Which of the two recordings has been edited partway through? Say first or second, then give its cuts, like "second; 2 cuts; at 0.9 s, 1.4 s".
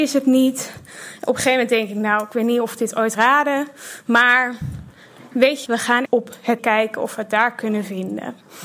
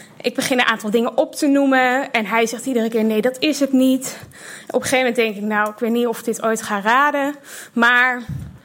first; 4 cuts; at 3.1 s, 5.7 s, 6.1 s, 6.6 s